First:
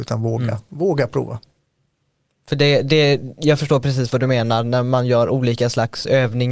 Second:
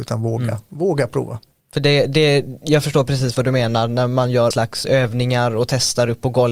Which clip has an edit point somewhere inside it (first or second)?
second